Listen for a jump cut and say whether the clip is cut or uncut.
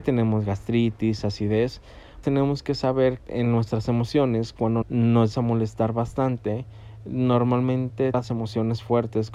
cut